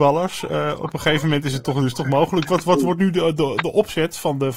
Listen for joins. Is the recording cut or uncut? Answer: uncut